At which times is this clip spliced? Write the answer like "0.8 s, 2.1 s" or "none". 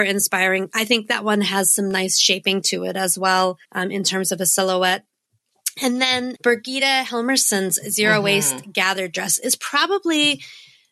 3.6 s, 6.4 s